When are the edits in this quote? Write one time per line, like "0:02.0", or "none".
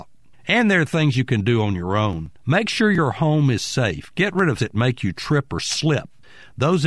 0:02.3
0:04.6